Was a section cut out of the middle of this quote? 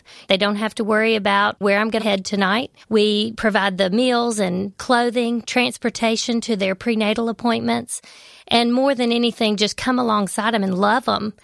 yes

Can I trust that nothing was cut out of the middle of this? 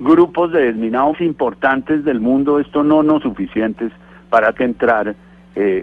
no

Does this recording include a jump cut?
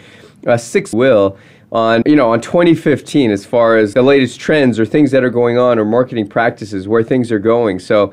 yes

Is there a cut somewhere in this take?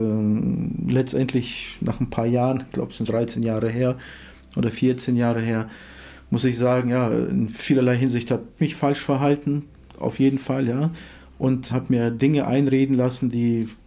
yes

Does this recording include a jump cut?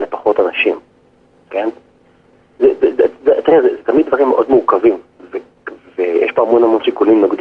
no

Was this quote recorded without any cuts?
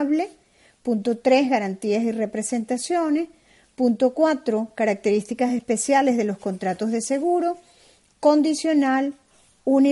yes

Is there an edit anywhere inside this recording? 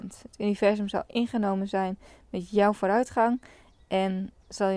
no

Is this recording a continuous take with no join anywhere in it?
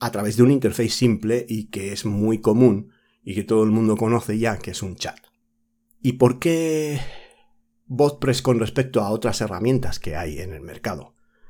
yes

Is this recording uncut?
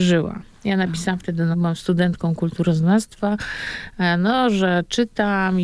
no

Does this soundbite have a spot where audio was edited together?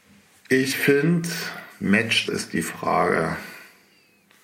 yes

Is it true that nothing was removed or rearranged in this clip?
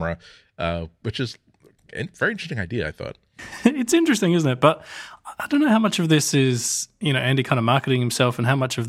yes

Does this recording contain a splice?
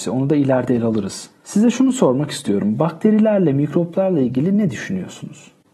yes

